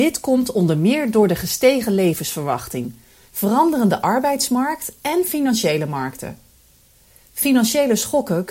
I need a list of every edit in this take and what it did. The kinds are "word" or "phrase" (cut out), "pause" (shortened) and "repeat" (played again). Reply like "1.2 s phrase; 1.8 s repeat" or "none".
none